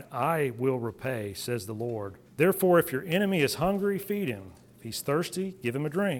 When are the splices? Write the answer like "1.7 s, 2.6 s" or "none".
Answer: 2.2 s